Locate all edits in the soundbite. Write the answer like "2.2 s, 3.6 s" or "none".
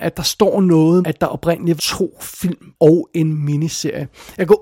1.0 s, 1.8 s, 2.7 s